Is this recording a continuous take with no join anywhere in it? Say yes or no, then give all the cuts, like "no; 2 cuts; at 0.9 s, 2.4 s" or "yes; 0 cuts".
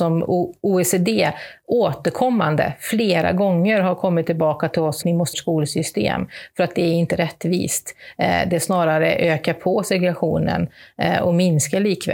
no; 2 cuts; at 5.0 s, 5.3 s